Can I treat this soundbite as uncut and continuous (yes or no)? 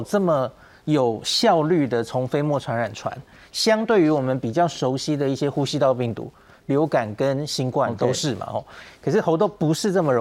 yes